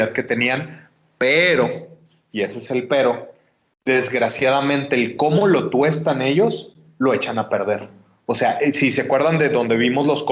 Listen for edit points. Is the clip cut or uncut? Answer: uncut